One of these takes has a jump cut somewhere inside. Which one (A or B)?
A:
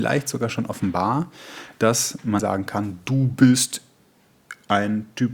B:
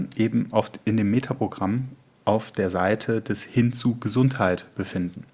A